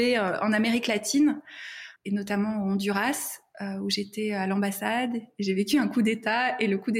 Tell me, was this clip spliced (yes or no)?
yes